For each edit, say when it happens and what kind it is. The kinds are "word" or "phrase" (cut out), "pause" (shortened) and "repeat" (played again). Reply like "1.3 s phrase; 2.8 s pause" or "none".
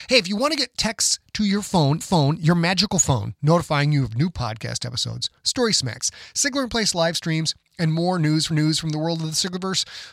2.0 s repeat; 8.5 s repeat